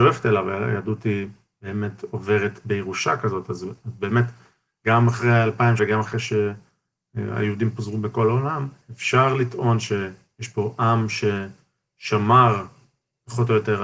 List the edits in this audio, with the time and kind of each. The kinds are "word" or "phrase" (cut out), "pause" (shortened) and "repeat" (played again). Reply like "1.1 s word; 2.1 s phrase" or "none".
5.8 s word